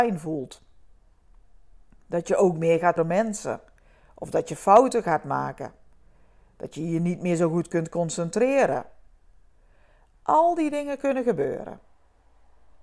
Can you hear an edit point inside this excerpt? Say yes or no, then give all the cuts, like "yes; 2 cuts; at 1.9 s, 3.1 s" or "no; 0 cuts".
yes; 1 cut; at 3.0 s